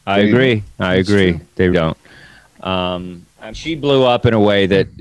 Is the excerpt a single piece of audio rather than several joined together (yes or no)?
no